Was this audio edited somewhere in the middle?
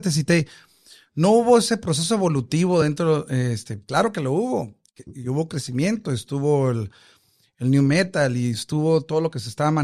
no; 0 cuts

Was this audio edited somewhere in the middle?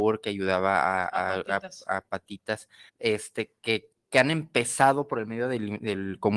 yes; 1 cut; at 2.9 s

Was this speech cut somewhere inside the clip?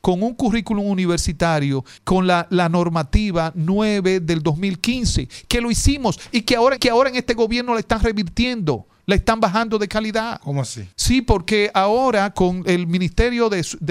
yes; 4 cuts; at 2.0 s, 6.8 s, 9.0 s, 10.9 s

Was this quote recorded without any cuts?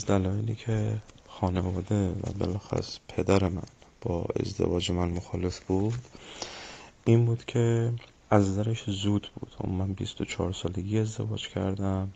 yes; 0 cuts

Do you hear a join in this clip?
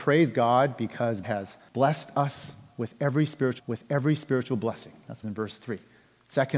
yes; 4 cuts; at 1.2 s, 1.7 s, 3.6 s, 5.2 s

